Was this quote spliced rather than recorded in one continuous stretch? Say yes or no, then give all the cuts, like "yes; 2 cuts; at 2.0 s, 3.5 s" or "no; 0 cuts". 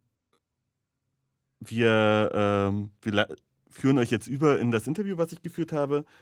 no; 0 cuts